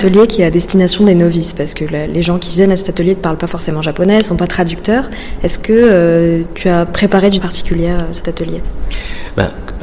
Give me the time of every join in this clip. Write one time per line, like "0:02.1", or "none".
0:07.4